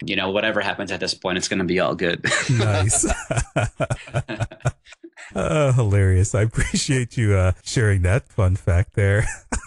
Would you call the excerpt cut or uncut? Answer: uncut